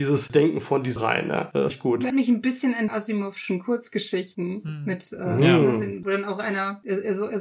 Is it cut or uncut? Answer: cut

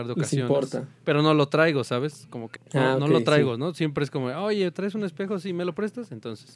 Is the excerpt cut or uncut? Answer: cut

